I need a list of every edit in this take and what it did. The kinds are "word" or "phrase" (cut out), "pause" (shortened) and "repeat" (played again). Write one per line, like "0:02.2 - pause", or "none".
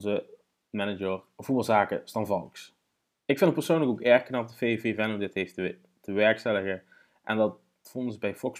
none

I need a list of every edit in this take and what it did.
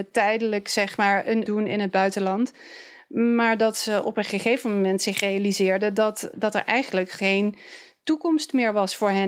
0:01.5 - phrase
0:06.3 - word

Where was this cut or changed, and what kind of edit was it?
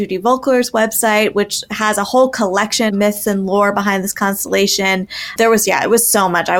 0:02.9 - word

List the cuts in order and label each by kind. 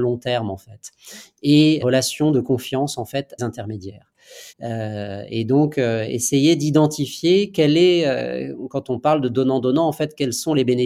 0:01.8 - phrase
0:03.4 - phrase
0:04.5 - pause

